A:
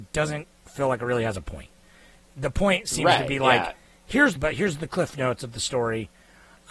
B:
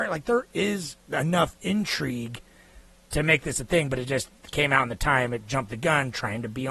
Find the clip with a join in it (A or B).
A